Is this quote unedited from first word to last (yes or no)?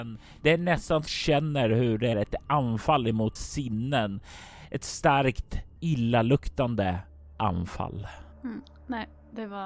no